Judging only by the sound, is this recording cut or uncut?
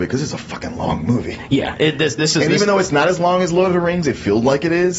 uncut